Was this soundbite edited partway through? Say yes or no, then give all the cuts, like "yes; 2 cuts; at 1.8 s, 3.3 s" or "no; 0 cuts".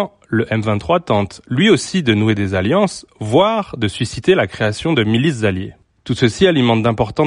no; 0 cuts